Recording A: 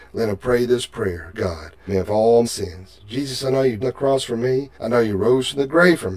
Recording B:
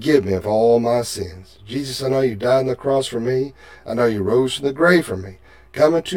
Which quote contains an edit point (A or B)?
A